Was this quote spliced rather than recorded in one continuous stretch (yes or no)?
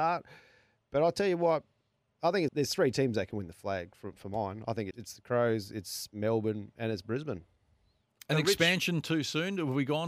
yes